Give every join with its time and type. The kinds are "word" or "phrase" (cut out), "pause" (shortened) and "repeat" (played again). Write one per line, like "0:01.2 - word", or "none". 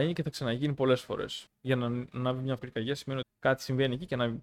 0:01.5 - pause
0:02.6 - word
0:03.2 - word